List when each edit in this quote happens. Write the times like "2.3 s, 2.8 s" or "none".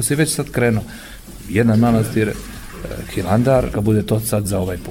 3.7 s